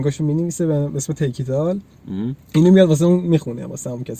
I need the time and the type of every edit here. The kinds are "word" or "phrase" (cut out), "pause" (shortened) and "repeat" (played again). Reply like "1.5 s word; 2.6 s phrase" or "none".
none